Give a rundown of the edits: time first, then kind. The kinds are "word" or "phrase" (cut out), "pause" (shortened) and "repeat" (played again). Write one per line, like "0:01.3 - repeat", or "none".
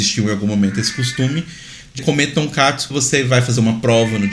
0:02.0 - word
0:02.9 - word